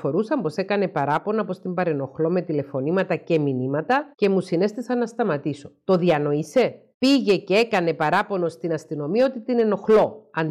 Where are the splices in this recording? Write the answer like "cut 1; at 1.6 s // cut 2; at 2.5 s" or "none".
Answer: cut 1; at 4.1 s // cut 2; at 6.9 s